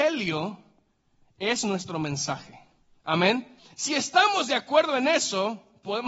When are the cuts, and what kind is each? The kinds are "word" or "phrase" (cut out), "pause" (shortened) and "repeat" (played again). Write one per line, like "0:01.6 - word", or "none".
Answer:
0:03.6 - pause